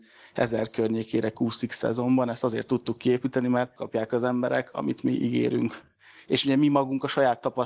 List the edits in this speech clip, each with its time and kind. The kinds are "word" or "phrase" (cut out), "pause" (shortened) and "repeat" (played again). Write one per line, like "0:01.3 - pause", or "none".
0:03.8 - word